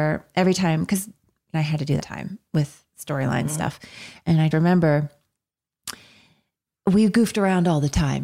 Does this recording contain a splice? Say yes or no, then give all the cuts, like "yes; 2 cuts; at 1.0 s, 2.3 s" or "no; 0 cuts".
yes; 3 cuts; at 1.5 s, 2.0 s, 4.5 s